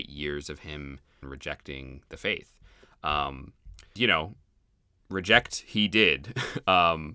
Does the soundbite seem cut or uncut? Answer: cut